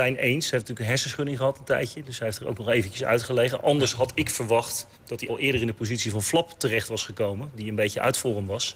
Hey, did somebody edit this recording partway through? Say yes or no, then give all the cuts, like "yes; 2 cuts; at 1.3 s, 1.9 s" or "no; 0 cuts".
yes; 2 cuts; at 4.9 s, 5.3 s